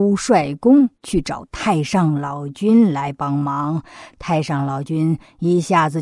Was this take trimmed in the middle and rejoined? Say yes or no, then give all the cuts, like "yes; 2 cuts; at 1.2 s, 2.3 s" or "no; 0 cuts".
yes; 1 cut; at 0.9 s